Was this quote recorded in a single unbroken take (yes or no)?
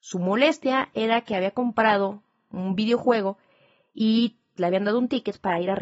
no